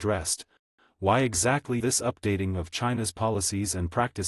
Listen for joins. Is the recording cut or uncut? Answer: cut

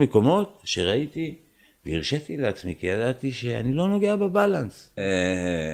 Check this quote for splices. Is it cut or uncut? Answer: uncut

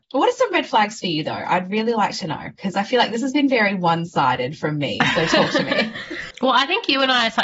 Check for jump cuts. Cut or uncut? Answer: uncut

